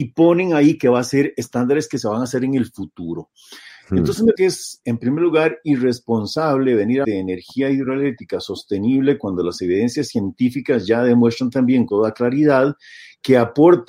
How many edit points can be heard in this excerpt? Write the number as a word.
four